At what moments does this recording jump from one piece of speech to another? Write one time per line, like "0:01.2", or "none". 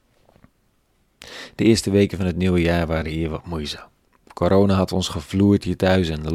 none